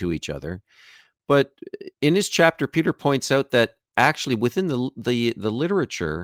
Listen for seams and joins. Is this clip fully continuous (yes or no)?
no